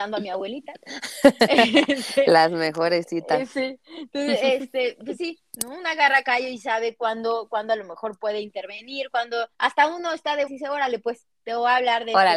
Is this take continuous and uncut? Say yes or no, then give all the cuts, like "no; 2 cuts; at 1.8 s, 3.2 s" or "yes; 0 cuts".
no; 2 cuts; at 9.5 s, 10.5 s